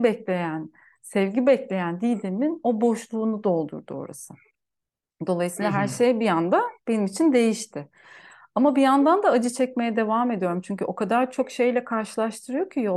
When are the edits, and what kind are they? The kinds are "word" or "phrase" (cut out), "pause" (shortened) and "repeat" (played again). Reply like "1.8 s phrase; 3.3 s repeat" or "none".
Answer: none